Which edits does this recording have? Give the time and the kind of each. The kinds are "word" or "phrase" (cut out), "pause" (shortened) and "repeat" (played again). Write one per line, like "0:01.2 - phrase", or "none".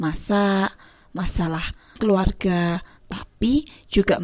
0:02.0 - word